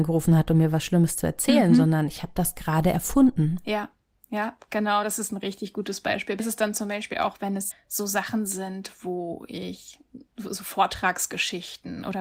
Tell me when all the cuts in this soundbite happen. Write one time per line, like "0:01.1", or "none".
0:06.4
0:07.7
0:10.3